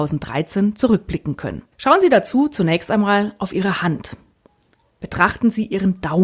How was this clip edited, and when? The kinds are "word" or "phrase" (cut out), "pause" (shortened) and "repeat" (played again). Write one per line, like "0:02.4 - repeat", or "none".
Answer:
0:01.7 - pause